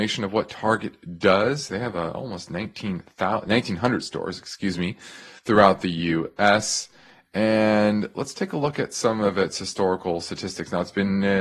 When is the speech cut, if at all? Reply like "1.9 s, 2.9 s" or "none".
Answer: none

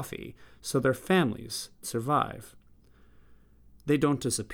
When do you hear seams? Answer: 1.8 s

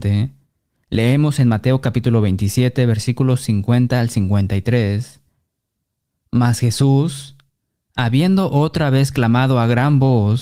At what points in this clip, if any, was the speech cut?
none

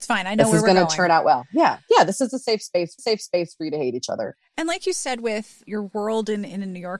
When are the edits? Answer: 3.0 s, 5.7 s

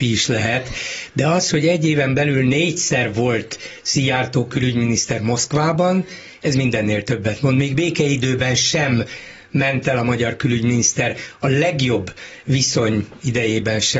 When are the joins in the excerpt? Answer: none

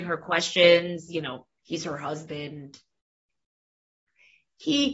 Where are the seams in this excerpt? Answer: 1.1 s

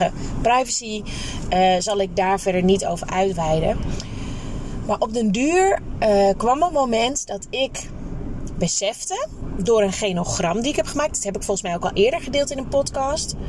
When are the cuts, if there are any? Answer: none

